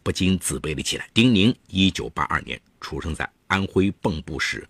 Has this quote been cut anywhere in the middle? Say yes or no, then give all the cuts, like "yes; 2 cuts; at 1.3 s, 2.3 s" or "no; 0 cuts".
yes; 1 cut; at 1.1 s